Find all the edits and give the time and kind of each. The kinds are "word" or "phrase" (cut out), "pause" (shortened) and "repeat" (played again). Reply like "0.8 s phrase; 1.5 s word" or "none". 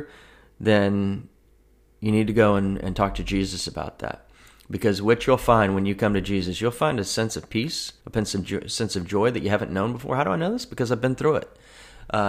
8.0 s pause